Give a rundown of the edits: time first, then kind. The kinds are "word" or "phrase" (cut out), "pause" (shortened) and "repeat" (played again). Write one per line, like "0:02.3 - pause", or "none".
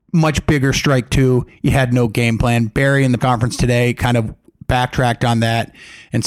0:03.2 - word